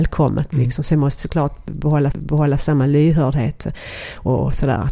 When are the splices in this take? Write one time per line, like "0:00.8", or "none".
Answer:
0:01.2
0:02.1